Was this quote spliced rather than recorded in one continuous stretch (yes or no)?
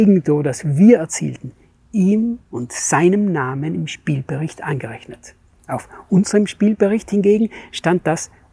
no